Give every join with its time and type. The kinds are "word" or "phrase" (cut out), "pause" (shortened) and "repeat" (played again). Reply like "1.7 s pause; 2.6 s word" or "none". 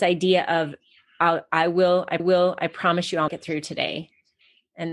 2.2 s repeat; 3.3 s word